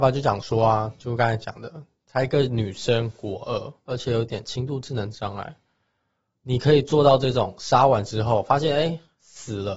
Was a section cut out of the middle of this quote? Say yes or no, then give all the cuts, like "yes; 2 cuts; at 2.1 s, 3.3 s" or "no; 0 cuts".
no; 0 cuts